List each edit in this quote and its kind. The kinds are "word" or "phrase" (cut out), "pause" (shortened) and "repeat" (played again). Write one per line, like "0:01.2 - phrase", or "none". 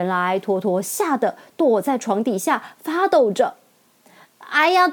none